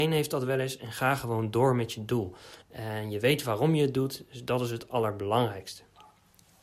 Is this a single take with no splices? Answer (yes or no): no